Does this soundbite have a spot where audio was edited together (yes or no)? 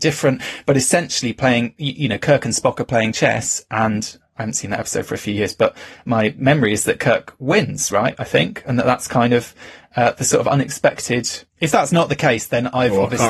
yes